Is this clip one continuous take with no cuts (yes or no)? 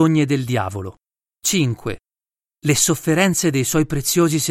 no